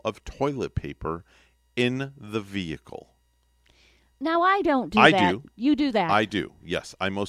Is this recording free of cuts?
yes; 0 cuts

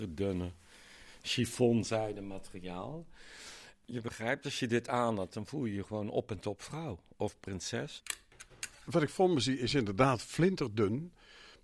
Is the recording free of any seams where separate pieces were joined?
yes; 0 cuts

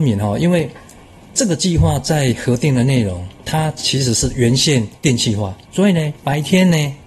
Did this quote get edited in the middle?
yes; 1 cut; at 6.2 s

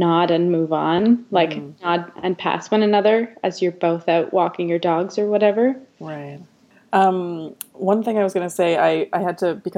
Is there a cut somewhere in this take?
no; 0 cuts

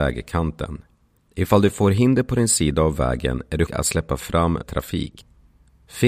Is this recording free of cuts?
no; 3 cuts; at 1.2 s, 3.7 s, 4.6 s

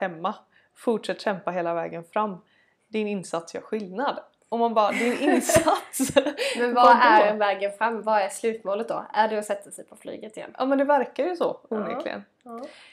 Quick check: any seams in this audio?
no; 0 cuts

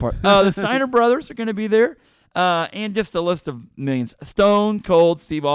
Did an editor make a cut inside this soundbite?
no; 0 cuts

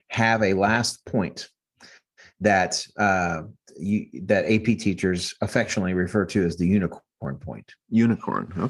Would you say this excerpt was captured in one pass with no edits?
yes; 0 cuts

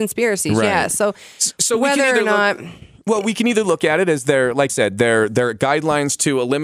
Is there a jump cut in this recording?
yes; 1 cut; at 4.7 s

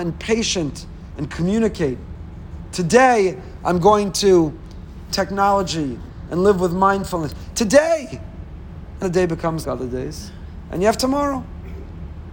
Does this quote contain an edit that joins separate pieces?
yes; 3 cuts; at 5.1 s, 9.0 s, 9.6 s

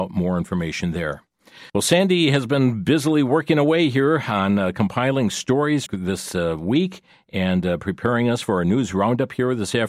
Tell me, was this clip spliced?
yes; 2 cuts; at 1.7 s, 5.9 s

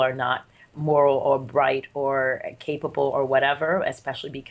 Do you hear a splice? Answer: no; 0 cuts

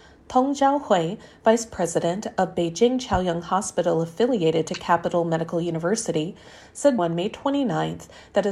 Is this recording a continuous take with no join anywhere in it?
no; 1 cut; at 7.0 s

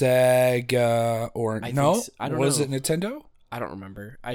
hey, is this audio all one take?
yes; 0 cuts

